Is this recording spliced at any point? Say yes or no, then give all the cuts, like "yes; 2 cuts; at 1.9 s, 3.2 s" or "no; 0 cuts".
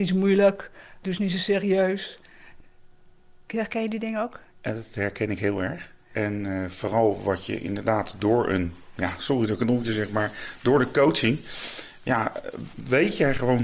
yes; 1 cut; at 4.5 s